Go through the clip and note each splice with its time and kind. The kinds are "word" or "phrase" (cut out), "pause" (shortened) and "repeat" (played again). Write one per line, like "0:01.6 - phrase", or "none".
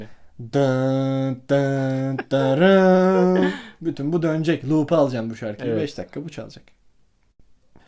none